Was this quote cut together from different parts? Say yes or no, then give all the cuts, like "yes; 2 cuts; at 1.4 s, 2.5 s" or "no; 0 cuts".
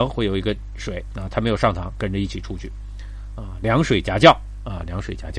no; 0 cuts